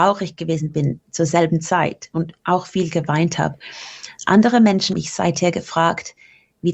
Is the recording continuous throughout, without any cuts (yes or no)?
no